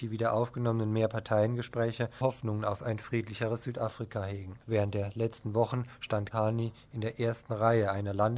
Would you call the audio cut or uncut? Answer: cut